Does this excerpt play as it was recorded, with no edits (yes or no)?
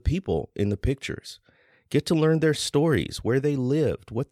yes